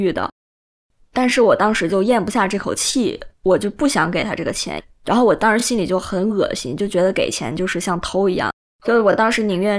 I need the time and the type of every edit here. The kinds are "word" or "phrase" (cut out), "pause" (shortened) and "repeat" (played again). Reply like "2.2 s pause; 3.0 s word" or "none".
3.3 s pause; 8.7 s pause